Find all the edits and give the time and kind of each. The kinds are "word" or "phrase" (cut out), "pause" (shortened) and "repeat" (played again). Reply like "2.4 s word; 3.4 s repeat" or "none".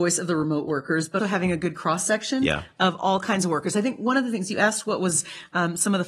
1.2 s word